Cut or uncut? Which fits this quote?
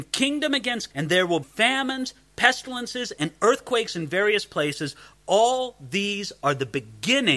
cut